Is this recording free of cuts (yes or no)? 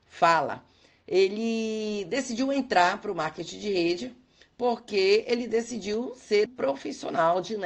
no